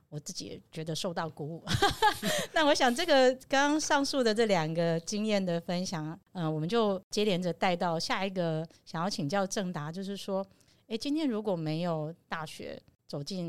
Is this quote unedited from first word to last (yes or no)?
yes